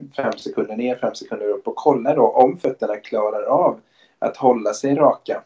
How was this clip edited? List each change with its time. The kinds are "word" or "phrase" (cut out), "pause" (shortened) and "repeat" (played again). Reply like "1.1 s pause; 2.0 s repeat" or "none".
none